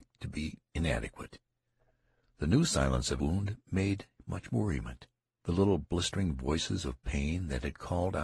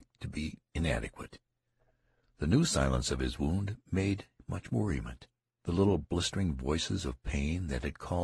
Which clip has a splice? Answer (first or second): first